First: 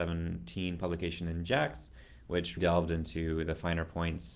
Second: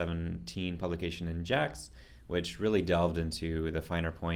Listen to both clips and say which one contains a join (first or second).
first